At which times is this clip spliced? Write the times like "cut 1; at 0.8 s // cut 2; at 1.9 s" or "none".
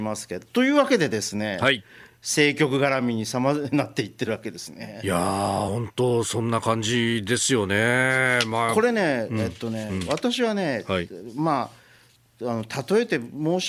none